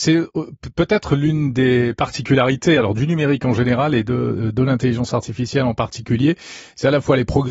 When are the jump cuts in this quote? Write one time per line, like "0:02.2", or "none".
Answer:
none